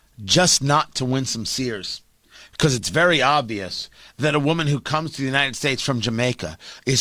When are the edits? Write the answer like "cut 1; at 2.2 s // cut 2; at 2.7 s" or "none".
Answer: none